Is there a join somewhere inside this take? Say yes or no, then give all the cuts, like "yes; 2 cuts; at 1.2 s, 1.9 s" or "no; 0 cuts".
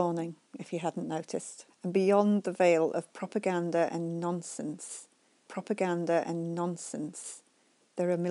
yes; 2 cuts; at 1.7 s, 5.5 s